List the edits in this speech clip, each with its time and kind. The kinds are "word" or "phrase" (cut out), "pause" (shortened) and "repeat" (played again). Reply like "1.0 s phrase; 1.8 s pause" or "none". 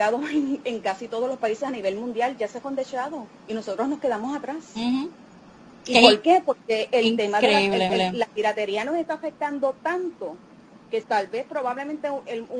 2.6 s word; 3.4 s pause; 7.9 s repeat; 11.0 s word